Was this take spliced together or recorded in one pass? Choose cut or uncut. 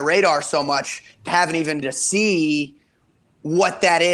cut